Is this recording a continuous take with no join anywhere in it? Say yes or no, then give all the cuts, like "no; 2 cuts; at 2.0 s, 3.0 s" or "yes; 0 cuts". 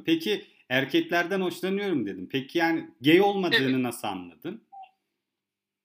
yes; 0 cuts